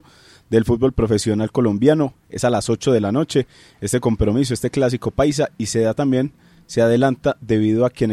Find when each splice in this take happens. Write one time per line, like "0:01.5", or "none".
none